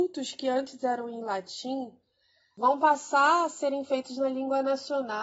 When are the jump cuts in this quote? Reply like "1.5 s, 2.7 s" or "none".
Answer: none